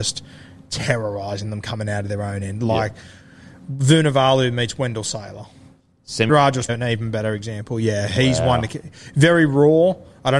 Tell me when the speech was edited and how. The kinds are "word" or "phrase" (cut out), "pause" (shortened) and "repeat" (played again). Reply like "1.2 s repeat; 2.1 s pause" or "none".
6.3 s phrase; 6.7 s word